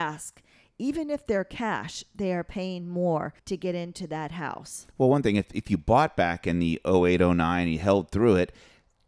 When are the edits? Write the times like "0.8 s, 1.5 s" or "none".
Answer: 3.4 s